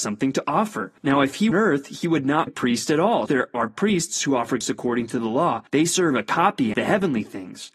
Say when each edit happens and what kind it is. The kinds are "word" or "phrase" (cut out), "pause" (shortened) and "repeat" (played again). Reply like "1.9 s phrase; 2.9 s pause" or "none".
1.0 s pause; 1.5 s phrase; 2.5 s word; 3.3 s word; 4.6 s word; 5.7 s pause; 6.7 s phrase

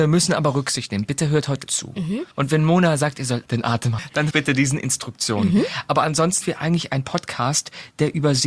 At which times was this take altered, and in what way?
1.7 s word; 2.3 s pause; 3.5 s word; 4.0 s phrase; 4.3 s word; 6.4 s word

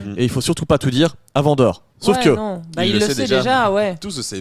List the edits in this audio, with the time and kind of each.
none

